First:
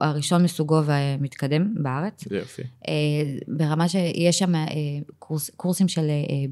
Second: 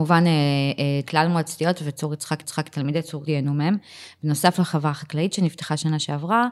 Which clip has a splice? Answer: second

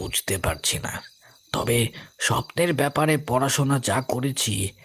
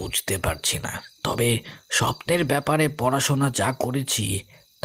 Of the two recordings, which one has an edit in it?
second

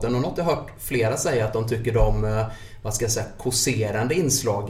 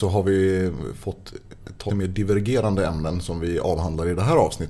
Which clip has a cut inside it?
second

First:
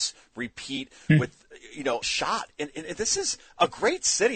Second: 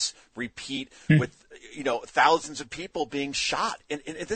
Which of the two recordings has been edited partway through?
first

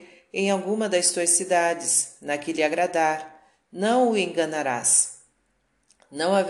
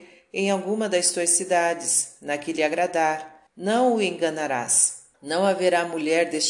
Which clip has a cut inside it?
second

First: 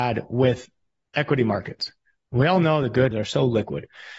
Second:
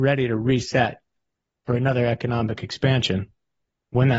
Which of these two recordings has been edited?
first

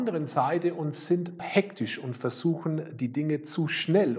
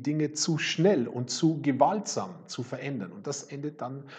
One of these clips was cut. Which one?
first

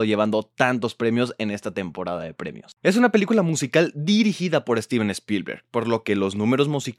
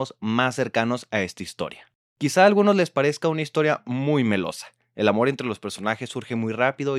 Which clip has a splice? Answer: first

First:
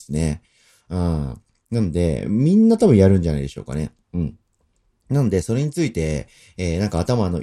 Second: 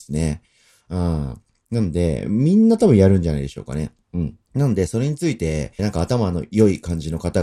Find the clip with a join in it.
second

